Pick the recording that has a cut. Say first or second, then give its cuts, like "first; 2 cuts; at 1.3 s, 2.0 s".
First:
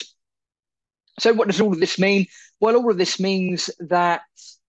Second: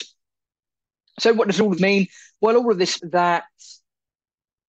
second; 2 cuts; at 1.8 s, 3.0 s